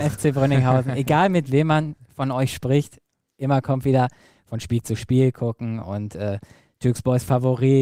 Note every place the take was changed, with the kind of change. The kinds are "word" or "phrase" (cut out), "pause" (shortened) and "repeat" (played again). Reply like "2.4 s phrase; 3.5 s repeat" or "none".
none